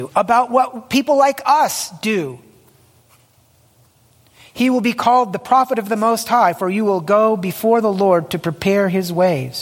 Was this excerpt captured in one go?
yes; 0 cuts

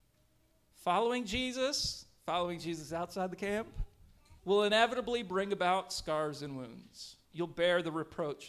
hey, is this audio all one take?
no; 2 cuts; at 4.4 s, 7.2 s

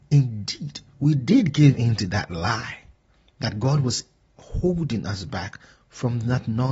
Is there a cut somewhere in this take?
no; 0 cuts

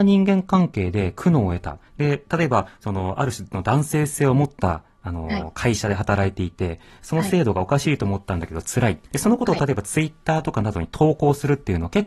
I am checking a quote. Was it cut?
yes; 2 cuts; at 1.9 s, 9.0 s

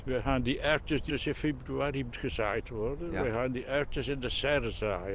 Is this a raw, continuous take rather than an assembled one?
no; 2 cuts; at 1.1 s, 2.1 s

